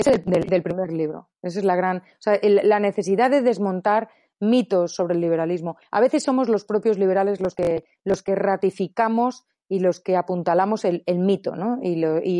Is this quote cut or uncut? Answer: uncut